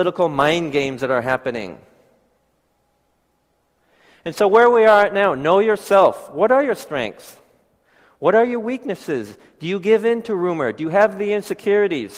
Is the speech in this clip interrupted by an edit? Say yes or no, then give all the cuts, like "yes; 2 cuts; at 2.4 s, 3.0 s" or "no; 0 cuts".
no; 0 cuts